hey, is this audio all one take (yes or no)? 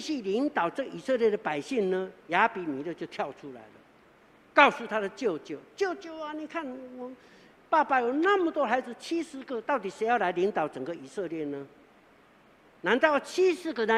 yes